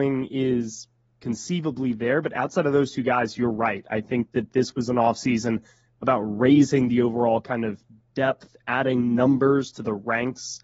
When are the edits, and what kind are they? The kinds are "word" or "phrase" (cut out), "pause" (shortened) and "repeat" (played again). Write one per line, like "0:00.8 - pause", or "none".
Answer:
none